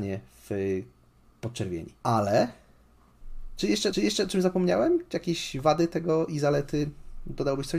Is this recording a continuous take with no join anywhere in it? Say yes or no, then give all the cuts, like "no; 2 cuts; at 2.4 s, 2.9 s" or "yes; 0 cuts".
no; 2 cuts; at 2.0 s, 3.9 s